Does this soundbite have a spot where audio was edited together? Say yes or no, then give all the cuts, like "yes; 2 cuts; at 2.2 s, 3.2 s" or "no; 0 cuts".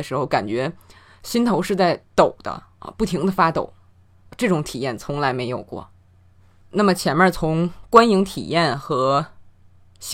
yes; 1 cut; at 6.4 s